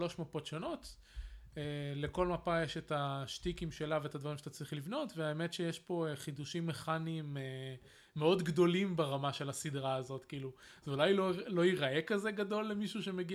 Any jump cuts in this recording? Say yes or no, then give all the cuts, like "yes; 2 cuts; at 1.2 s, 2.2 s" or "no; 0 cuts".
no; 0 cuts